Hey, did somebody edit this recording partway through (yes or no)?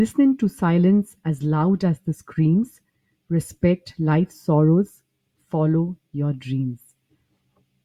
no